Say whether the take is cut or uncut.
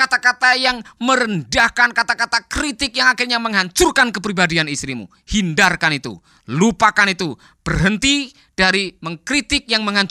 uncut